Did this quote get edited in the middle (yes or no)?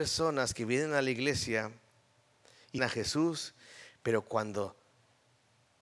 yes